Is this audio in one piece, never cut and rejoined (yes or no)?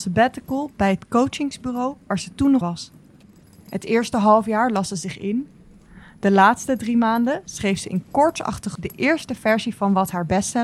no